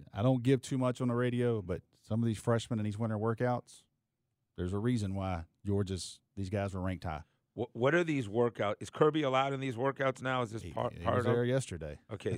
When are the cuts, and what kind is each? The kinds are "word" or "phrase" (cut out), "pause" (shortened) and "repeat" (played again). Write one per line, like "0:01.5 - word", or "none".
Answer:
none